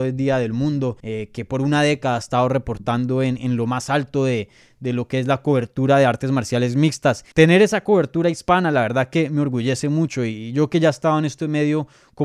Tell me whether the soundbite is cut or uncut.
cut